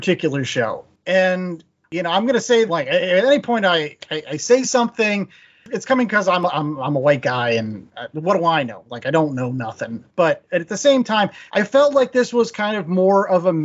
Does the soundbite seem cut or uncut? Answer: cut